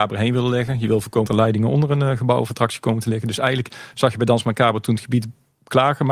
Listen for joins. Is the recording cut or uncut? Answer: cut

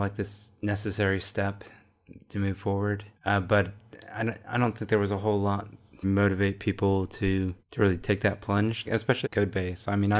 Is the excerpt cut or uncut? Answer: cut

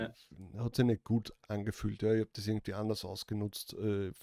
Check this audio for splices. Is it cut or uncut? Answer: uncut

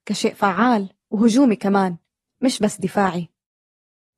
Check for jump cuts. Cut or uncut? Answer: uncut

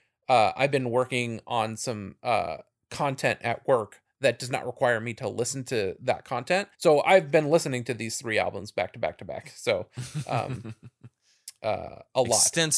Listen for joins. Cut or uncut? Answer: cut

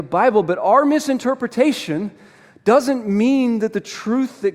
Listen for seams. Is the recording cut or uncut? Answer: uncut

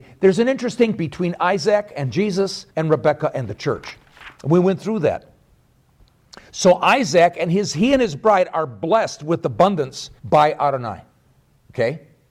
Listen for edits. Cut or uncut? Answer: cut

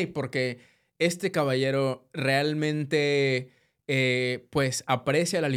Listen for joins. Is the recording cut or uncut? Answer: uncut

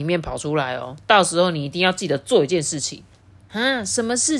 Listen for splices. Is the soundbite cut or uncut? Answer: uncut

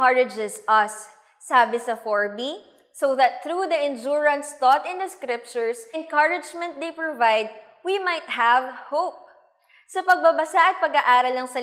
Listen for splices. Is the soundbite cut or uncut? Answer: cut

